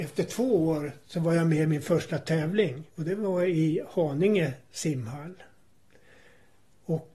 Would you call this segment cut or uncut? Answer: cut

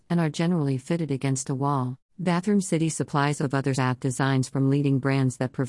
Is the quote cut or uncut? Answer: cut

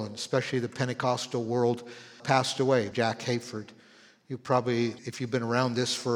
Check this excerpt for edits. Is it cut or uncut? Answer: cut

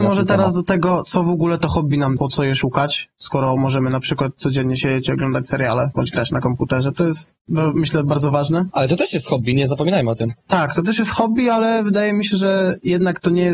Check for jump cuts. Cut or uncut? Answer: cut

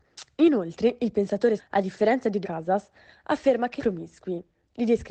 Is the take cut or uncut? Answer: cut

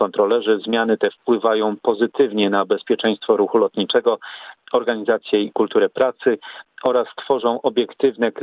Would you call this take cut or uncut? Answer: uncut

